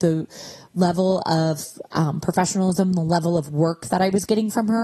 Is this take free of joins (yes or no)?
yes